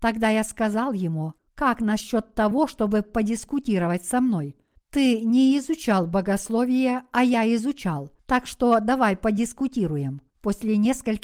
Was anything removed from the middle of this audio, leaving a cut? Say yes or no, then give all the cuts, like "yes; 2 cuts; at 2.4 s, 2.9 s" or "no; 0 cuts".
yes; 4 cuts; at 1.4 s, 4.8 s, 8.2 s, 10.3 s